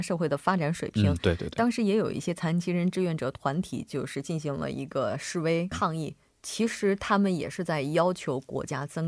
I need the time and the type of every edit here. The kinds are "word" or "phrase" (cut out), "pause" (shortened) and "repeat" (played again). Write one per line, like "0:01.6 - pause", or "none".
0:05.7 - word